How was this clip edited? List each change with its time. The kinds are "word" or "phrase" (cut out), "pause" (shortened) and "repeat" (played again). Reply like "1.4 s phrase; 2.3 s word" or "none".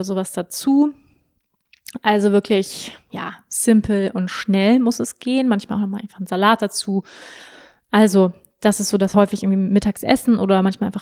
9.1 s phrase